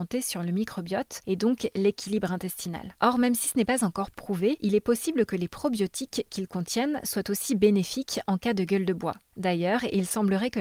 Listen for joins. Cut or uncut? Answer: uncut